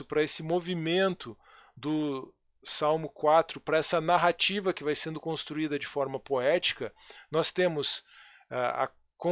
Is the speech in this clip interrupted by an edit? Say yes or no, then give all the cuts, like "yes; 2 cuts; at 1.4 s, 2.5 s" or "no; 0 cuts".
no; 0 cuts